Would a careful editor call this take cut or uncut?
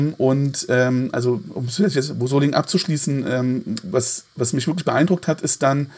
uncut